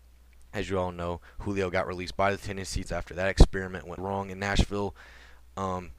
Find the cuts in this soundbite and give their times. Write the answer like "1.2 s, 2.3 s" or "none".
2.8 s, 4.0 s